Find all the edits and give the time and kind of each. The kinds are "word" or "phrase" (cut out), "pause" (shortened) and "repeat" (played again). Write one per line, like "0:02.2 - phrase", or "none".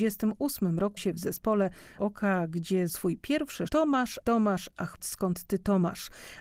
0:01.0 - word
0:02.0 - word
0:02.9 - word
0:03.7 - word
0:04.2 - word
0:05.0 - word